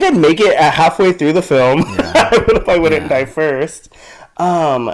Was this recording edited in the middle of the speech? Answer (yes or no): yes